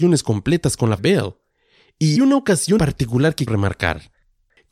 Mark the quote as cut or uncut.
cut